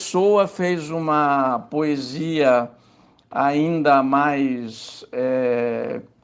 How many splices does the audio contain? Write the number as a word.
zero